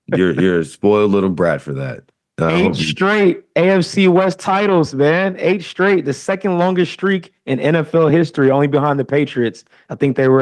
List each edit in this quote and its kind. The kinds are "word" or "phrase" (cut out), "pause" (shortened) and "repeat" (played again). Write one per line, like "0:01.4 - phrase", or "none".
none